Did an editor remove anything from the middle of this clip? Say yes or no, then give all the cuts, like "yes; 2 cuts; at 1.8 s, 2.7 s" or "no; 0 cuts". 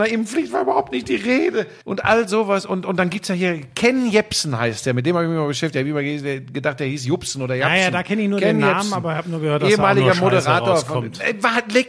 yes; 1 cut; at 1.8 s